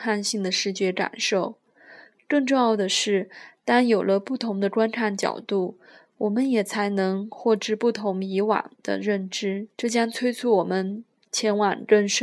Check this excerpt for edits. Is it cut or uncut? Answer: cut